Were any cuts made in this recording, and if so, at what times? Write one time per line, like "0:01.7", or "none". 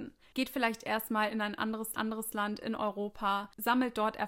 0:01.9